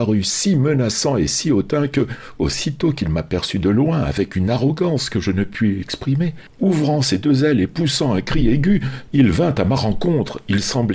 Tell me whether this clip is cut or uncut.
uncut